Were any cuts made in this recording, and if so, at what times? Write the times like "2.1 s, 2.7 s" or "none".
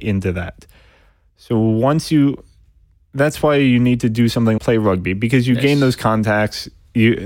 4.6 s